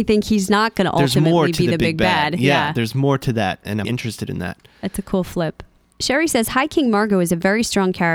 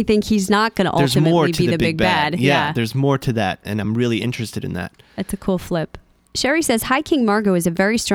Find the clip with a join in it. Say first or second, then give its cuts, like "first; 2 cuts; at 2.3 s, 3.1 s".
first; 1 cut; at 3.8 s